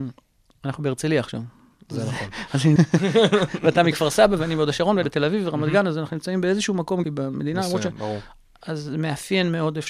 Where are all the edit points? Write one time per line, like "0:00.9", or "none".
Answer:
0:02.8
0:05.0
0:07.0